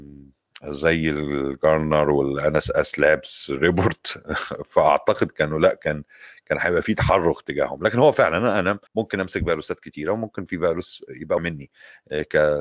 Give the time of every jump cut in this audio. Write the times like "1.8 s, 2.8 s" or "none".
8.9 s, 11.4 s